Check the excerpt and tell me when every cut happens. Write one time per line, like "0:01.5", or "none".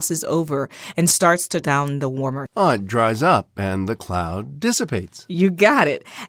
0:01.6
0:02.5

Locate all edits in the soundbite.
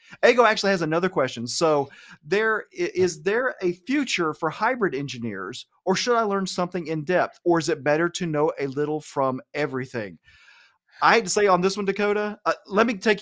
none

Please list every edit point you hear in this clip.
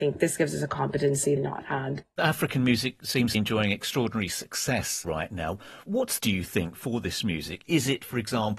0:01.4
0:03.3
0:05.0
0:06.2

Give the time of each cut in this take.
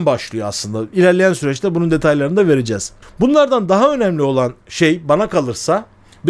0:03.0

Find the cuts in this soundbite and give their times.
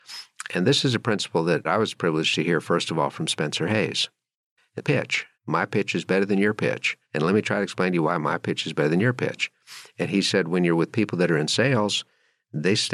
0:01.6
0:04.8
0:05.3
0:07.0

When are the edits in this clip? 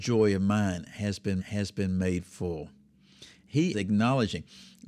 0:01.4
0:03.7

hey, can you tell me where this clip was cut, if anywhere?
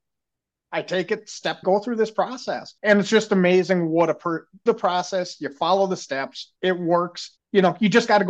0:01.6
0:02.8
0:04.7
0:06.6
0:07.4

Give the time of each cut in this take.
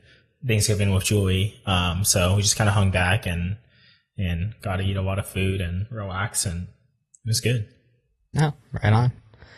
none

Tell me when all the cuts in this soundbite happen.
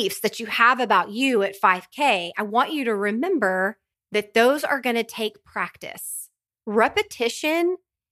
none

